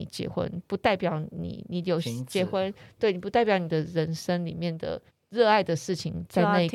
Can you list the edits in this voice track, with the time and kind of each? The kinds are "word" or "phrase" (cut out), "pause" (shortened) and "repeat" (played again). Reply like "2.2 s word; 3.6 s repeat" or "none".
5.1 s pause